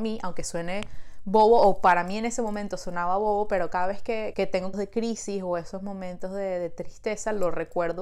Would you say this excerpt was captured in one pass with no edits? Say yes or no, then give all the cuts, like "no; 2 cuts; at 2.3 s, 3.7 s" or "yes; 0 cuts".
no; 2 cuts; at 4.3 s, 4.7 s